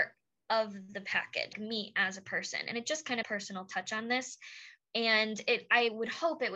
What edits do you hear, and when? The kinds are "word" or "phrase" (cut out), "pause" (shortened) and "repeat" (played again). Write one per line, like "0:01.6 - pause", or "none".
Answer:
0:01.5 - word
0:03.2 - phrase